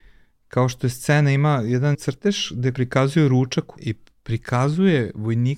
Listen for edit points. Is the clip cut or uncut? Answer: cut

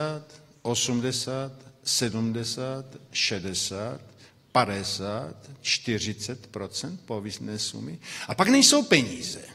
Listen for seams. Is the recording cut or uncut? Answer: uncut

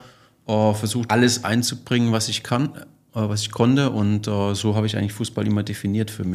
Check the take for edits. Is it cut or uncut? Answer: cut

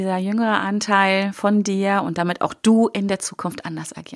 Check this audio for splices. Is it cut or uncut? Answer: uncut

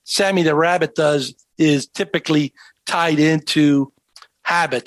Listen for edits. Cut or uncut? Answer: uncut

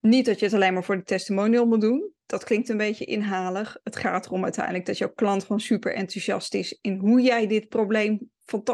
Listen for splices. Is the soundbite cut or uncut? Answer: uncut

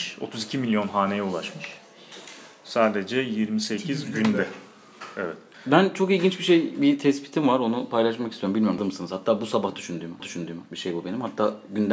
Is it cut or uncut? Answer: cut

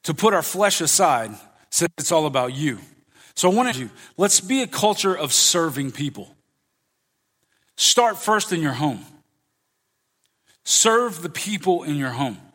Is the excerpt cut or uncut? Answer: cut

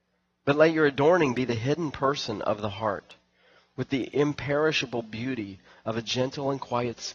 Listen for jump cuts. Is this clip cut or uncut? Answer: uncut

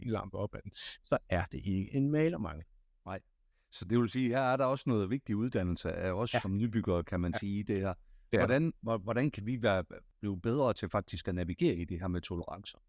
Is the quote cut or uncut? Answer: uncut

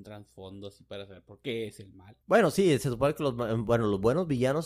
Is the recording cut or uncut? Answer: cut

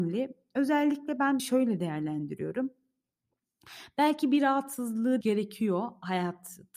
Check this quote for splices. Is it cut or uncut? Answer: cut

